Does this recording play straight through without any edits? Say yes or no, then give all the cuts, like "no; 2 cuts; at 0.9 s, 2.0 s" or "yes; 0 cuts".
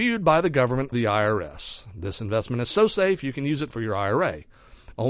no; 1 cut; at 0.9 s